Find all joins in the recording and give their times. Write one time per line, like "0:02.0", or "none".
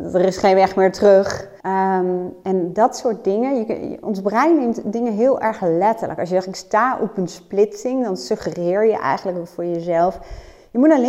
0:01.6